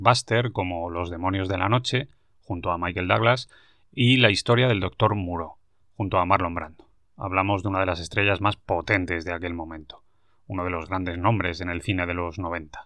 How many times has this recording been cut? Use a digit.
0